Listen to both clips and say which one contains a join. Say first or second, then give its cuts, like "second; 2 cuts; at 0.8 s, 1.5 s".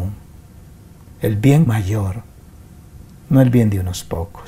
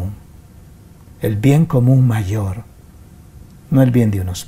first; 1 cut; at 1.7 s